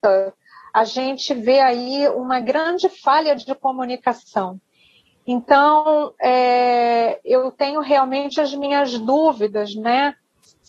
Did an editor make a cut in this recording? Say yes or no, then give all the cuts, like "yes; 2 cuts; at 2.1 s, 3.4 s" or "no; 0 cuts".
no; 0 cuts